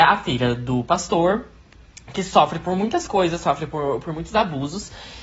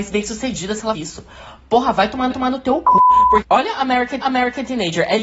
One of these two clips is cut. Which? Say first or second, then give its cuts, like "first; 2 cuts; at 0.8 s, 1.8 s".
second; 4 cuts; at 0.9 s, 2.3 s, 3.4 s, 4.2 s